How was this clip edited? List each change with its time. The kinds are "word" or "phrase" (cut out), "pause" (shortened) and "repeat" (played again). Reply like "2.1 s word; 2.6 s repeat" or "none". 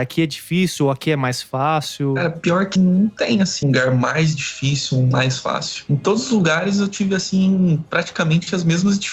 2.8 s word; 3.6 s word

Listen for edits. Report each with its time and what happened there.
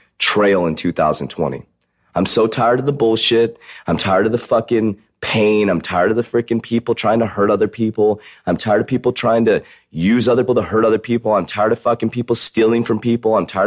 10.5 s word

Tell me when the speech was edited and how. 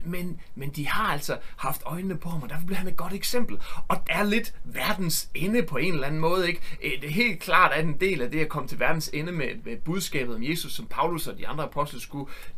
4.1 s phrase

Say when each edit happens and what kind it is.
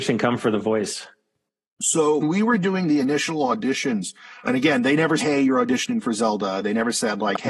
2.2 s word; 4.4 s word; 5.2 s word

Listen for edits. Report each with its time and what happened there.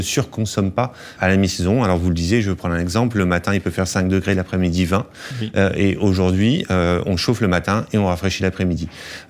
1.2 s word

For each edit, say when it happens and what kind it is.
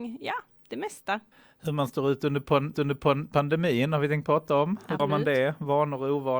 1.3 s pause; 2.7 s repeat; 5.0 s word

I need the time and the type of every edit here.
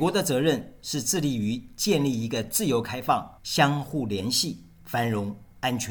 3.4 s pause

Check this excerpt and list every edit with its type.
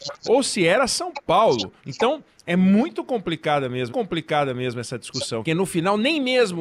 1.8 s pause; 3.9 s repeat; 5.4 s phrase

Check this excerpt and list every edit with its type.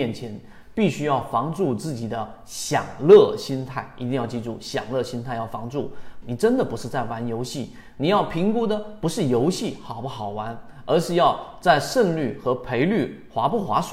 6.2 s phrase

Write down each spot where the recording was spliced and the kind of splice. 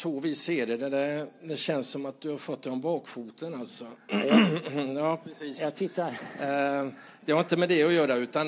none

